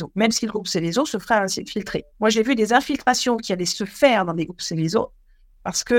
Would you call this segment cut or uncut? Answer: cut